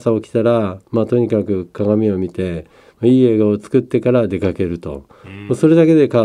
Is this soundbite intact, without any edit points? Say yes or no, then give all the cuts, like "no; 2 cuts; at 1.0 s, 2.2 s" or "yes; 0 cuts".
yes; 0 cuts